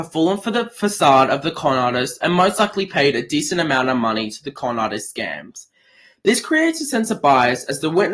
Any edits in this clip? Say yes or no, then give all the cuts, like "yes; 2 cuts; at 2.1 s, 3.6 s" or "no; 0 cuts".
no; 0 cuts